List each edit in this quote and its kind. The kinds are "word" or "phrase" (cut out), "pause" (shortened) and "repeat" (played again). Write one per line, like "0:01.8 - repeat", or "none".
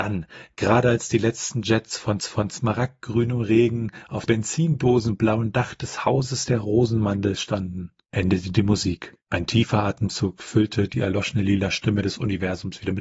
0:02.2 - repeat
0:04.3 - word
0:09.2 - pause

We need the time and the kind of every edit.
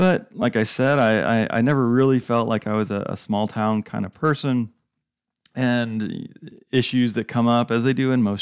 none

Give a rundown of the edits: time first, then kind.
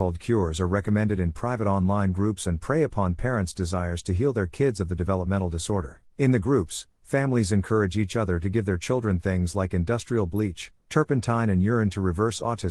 0:06.1 - pause

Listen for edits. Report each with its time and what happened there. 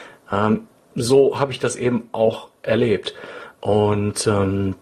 0:03.5 - pause

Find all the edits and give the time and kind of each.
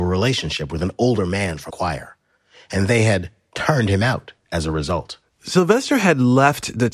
0:01.7 - word

